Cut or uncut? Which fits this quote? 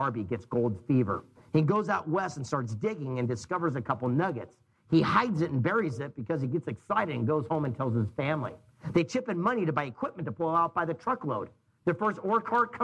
uncut